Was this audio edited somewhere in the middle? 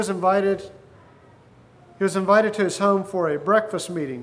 no; 0 cuts

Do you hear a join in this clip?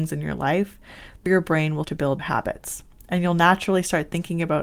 yes; 3 cuts; at 1.3 s, 1.8 s, 2.2 s

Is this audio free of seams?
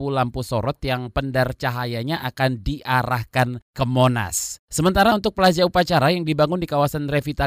yes; 0 cuts

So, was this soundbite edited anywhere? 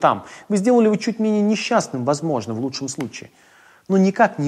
no; 0 cuts

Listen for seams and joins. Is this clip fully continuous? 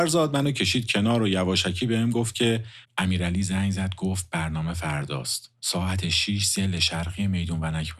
yes; 0 cuts

